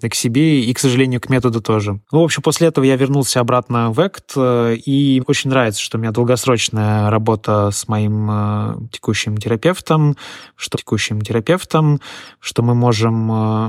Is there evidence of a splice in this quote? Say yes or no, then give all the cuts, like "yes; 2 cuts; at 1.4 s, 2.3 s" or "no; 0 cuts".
yes; 3 cuts; at 2.0 s, 5.2 s, 10.7 s